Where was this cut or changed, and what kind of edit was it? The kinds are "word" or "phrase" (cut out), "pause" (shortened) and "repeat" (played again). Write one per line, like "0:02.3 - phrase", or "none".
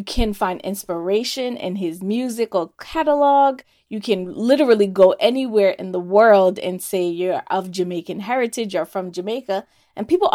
none